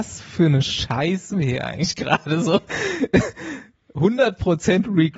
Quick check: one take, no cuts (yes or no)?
no